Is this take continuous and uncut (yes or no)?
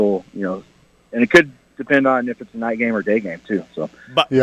yes